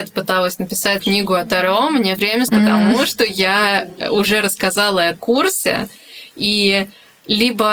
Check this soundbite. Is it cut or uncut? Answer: cut